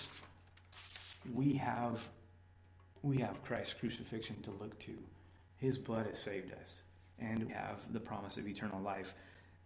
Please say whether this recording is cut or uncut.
cut